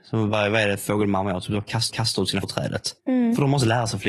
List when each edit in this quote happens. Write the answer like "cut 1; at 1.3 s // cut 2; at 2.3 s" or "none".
cut 1; at 1.9 s // cut 2; at 2.4 s // cut 3; at 3.0 s